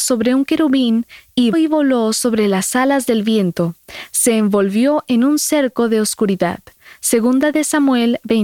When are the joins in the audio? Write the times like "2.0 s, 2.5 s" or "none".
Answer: 1.5 s